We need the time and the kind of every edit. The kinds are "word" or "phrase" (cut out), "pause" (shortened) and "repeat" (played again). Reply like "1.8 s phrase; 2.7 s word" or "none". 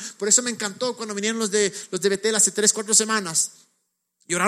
none